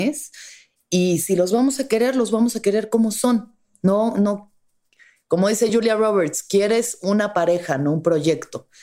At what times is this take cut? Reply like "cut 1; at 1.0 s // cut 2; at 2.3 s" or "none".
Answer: none